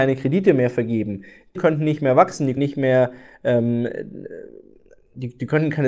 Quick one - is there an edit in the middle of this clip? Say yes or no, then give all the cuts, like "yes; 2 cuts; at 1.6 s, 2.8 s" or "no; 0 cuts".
yes; 2 cuts; at 1.6 s, 2.6 s